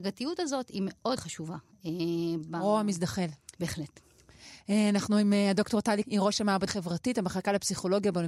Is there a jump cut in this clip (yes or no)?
yes